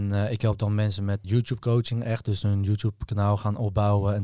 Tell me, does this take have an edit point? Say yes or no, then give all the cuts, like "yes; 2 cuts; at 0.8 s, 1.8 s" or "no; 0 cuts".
yes; 2 cuts; at 1.2 s, 2.4 s